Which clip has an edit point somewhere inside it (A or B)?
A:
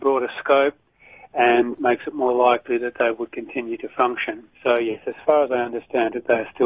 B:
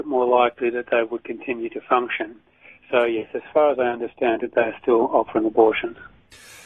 A